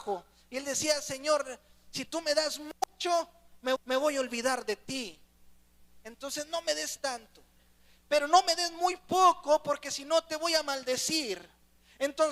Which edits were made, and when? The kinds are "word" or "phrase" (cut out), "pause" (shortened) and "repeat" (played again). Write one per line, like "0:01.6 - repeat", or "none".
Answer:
0:03.8 - repeat